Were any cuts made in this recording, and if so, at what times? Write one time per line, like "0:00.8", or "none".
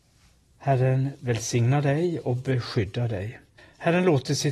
0:03.6